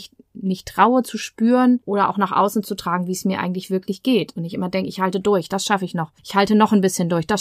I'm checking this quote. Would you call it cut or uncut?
cut